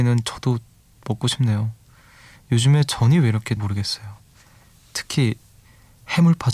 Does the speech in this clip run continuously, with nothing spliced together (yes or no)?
no